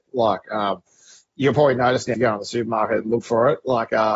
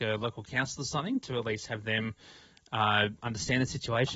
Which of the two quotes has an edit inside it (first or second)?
first